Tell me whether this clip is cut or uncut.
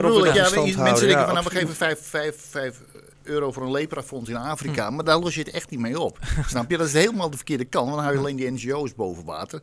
uncut